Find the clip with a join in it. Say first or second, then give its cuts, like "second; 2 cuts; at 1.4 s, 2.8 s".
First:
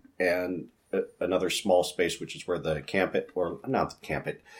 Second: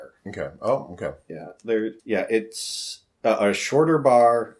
second; 1 cut; at 2.0 s